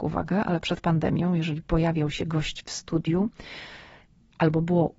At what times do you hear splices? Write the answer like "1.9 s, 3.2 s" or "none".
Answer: none